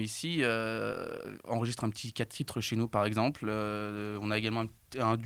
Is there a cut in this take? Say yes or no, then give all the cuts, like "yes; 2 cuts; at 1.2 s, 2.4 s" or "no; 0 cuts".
no; 0 cuts